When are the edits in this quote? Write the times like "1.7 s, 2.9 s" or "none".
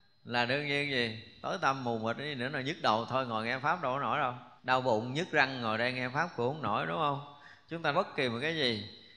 4.6 s, 7.9 s